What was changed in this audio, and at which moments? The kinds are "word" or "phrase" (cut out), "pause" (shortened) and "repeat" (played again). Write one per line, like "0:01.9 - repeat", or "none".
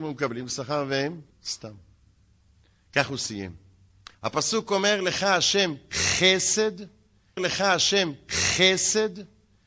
0:01.3 - word
0:04.1 - pause
0:07.4 - repeat